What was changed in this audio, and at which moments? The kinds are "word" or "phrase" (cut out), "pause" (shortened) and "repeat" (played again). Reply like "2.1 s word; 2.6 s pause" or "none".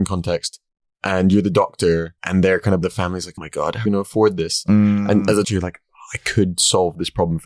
2.2 s pause; 2.8 s phrase; 3.4 s word; 3.9 s phrase; 5.4 s word